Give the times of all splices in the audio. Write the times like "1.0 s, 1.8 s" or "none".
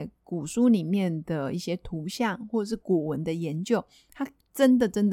none